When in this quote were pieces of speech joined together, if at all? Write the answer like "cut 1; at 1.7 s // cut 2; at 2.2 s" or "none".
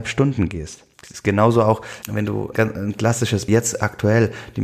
cut 1; at 0.9 s // cut 2; at 2.0 s // cut 3; at 2.5 s // cut 4; at 3.5 s